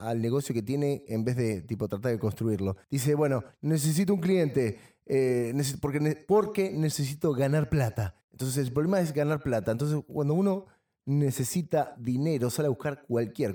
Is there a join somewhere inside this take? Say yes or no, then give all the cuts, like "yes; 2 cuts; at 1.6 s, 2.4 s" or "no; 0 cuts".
yes; 2 cuts; at 2.8 s, 8.2 s